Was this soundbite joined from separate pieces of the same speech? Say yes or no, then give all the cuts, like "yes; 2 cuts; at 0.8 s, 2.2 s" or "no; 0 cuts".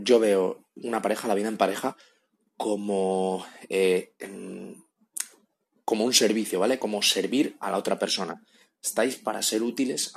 no; 0 cuts